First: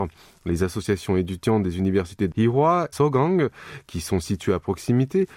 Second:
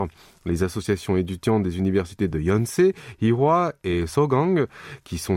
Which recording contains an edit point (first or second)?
first